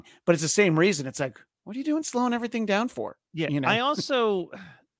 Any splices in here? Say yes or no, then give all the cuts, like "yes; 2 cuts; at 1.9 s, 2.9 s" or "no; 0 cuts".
no; 0 cuts